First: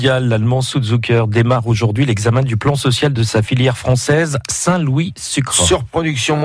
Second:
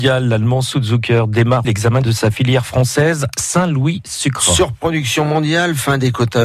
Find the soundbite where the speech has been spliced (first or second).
second